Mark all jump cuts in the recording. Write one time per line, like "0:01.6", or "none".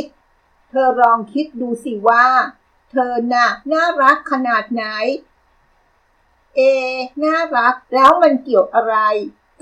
0:03.6
0:07.1
0:07.8